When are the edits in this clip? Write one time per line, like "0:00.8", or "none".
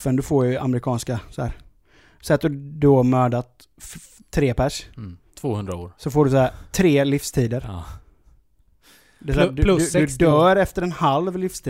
none

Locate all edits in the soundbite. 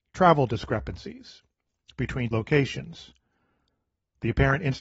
0:02.3

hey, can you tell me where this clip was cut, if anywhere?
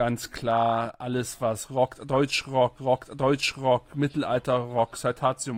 0:02.8

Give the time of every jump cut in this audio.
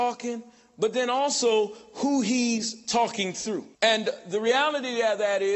0:03.7

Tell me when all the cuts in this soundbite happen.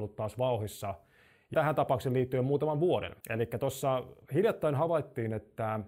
0:01.5
0:03.2
0:04.2

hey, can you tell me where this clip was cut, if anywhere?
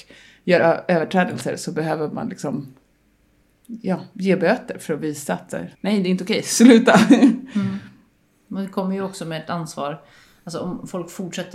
0:05.7

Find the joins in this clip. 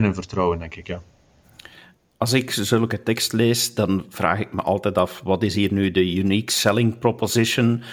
none

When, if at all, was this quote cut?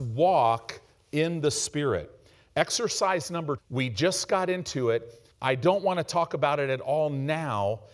0:03.6
0:05.3

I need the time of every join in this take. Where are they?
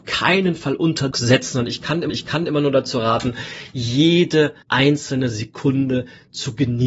0:01.1
0:02.1
0:04.6

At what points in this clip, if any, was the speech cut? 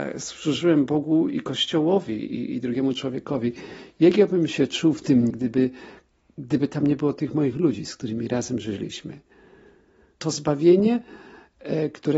0:05.3

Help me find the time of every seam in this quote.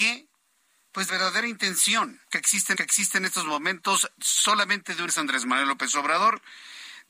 0:01.1
0:02.2
0:02.7
0:05.1

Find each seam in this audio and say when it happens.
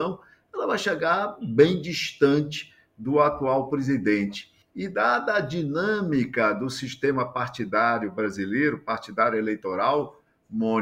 0:04.6

